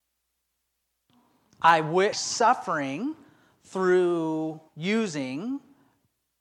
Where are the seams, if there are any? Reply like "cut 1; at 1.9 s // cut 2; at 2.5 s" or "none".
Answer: cut 1; at 2.1 s // cut 2; at 4.7 s

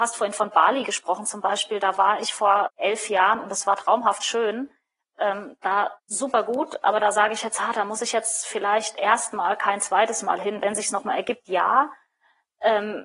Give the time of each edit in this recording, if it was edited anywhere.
cut 1; at 2.7 s // cut 2; at 6.0 s

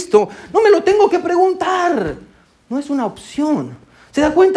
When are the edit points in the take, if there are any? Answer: none

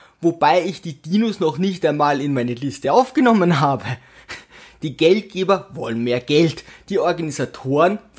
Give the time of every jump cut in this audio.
none

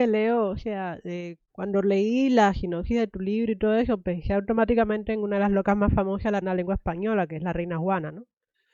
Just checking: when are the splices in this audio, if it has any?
cut 1; at 1.5 s // cut 2; at 6.4 s

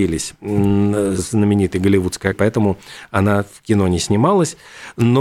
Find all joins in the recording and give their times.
cut 1; at 1.2 s // cut 2; at 2.3 s

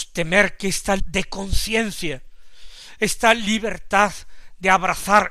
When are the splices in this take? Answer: cut 1; at 1.0 s

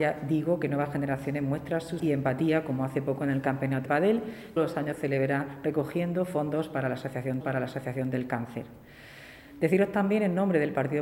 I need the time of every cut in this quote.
cut 1; at 2.0 s // cut 2; at 3.9 s // cut 3; at 4.6 s // cut 4; at 7.4 s

